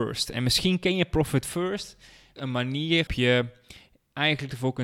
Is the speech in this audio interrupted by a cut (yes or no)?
yes